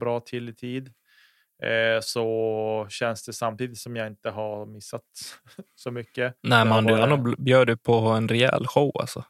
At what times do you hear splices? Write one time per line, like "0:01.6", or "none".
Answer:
0:06.4